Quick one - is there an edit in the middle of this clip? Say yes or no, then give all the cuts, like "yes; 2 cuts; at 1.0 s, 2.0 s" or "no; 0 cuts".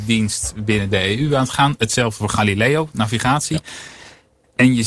no; 0 cuts